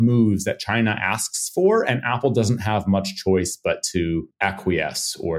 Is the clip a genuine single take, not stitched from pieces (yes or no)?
yes